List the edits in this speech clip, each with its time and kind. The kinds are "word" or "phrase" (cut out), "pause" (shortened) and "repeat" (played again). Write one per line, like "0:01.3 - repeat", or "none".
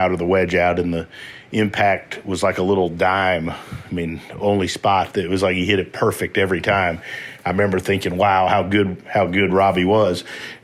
none